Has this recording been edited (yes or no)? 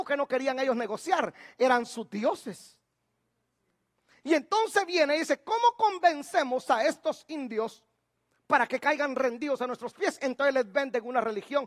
no